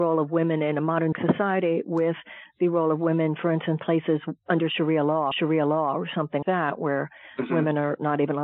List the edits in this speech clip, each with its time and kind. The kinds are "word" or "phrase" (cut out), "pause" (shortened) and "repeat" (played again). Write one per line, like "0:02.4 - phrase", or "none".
0:01.1 - word
0:03.8 - word
0:05.3 - repeat
0:06.4 - word